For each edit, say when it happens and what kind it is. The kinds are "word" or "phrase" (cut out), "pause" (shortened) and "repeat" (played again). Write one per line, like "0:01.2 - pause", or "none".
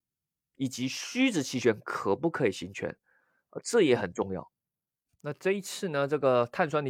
0:04.9 - pause